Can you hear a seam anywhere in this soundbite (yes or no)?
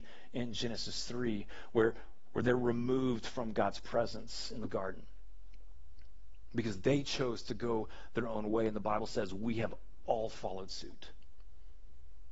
no